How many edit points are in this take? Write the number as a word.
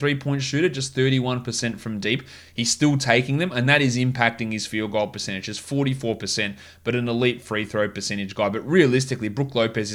zero